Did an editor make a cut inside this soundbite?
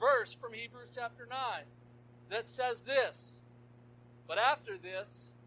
no; 0 cuts

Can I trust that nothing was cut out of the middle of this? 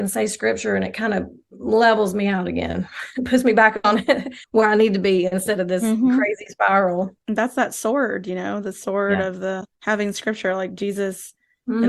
no; 3 cuts; at 4.4 s, 7.2 s, 9.7 s

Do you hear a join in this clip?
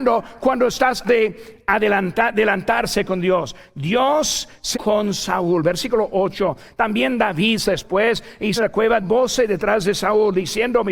yes; 5 cuts; at 1.0 s, 4.7 s, 7.7 s, 8.6 s, 9.0 s

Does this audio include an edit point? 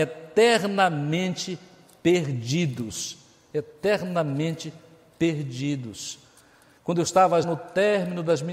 yes; 1 cut; at 7.4 s

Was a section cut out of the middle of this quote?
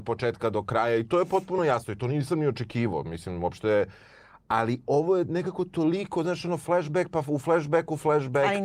no; 0 cuts

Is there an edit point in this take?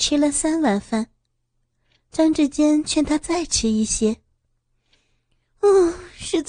no; 0 cuts

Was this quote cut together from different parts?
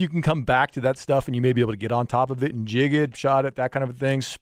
yes; 1 cut; at 3.1 s

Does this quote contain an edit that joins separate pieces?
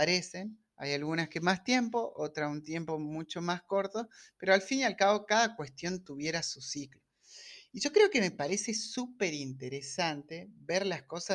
no; 0 cuts

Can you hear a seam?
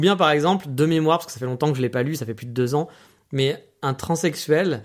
no; 0 cuts

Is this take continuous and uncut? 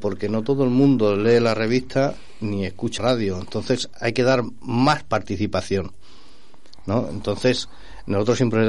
no; 1 cut; at 3.0 s

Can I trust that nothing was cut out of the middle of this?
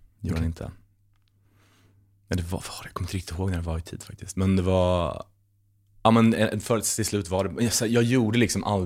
yes; 0 cuts

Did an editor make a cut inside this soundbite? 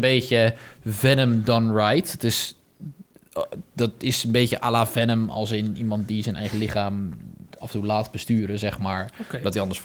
no; 0 cuts

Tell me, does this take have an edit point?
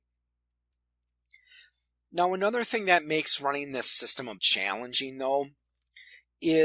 yes; 1 cut; at 4.4 s

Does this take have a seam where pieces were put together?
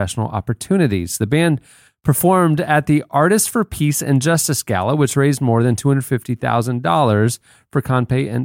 no; 0 cuts

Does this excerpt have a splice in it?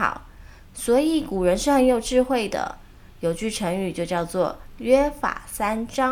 no; 0 cuts

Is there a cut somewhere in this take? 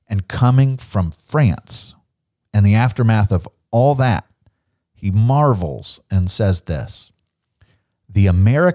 no; 0 cuts

